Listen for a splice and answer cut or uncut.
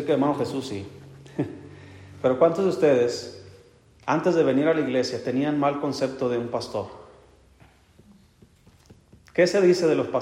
uncut